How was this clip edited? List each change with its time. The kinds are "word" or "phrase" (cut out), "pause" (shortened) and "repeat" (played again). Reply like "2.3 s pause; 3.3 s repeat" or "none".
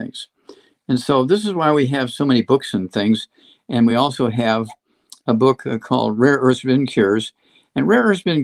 none